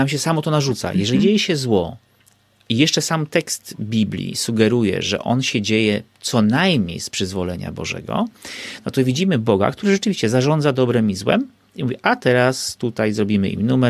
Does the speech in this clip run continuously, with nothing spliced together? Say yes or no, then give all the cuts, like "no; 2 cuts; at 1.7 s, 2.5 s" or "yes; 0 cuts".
yes; 0 cuts